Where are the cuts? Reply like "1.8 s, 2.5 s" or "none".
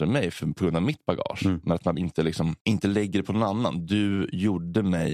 2.6 s